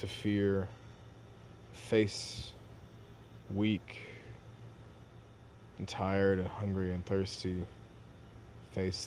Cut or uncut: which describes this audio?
uncut